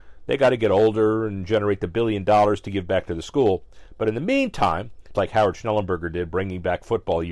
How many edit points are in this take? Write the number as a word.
one